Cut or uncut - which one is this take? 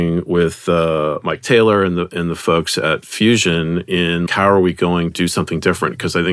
cut